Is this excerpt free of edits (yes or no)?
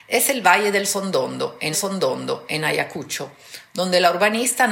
no